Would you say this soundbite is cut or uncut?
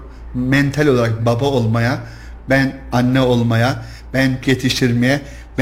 cut